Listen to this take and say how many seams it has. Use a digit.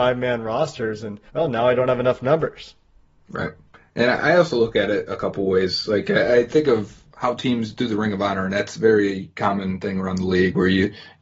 1